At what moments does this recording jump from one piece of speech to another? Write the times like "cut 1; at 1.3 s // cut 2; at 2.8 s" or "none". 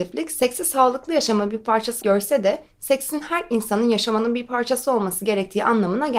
cut 1; at 2.0 s

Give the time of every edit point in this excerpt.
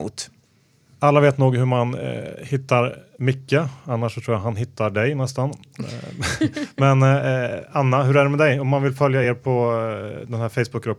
none

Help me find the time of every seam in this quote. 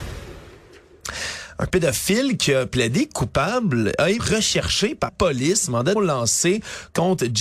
cut 1; at 4.2 s // cut 2; at 5.1 s // cut 3; at 6.0 s

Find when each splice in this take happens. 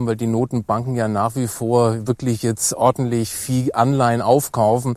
none

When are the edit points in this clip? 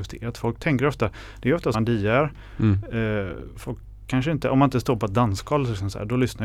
cut 1; at 1.7 s

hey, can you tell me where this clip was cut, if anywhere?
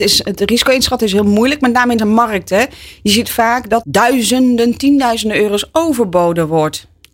cut 1; at 2.0 s // cut 2; at 3.8 s

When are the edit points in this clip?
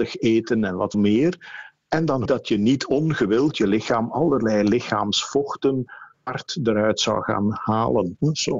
cut 1; at 0.9 s // cut 2; at 2.3 s // cut 3; at 3.5 s

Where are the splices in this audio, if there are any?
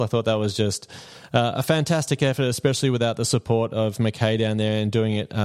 none

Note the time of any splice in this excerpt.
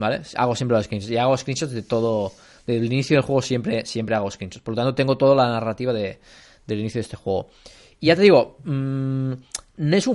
none

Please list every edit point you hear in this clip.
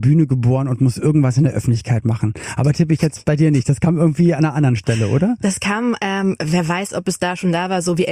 none

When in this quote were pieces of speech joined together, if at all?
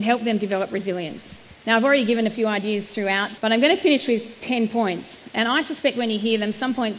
cut 1; at 1.6 s // cut 2; at 3.4 s

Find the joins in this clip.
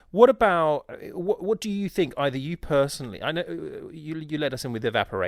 none

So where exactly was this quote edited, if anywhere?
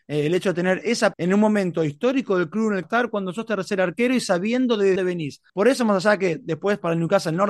cut 1; at 1.1 s // cut 2; at 2.8 s // cut 3; at 5.0 s // cut 4; at 5.5 s

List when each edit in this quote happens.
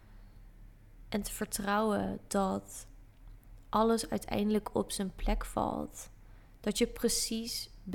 cut 1; at 6.5 s

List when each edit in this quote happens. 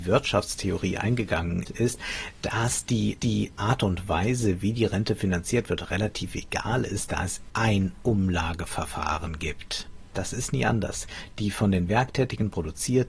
cut 1; at 1.6 s // cut 2; at 3.2 s // cut 3; at 7.5 s

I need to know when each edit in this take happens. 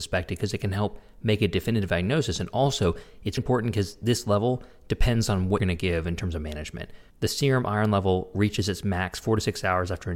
cut 1; at 3.4 s // cut 2; at 5.6 s // cut 3; at 7.1 s

